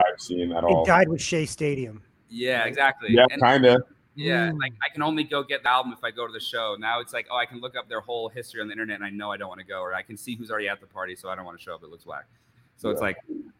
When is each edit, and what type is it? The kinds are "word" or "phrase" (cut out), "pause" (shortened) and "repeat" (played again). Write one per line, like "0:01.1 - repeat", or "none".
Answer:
none